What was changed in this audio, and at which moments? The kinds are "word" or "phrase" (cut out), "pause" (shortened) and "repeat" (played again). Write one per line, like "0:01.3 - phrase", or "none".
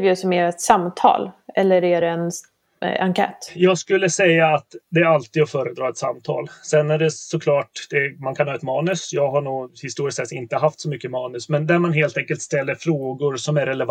none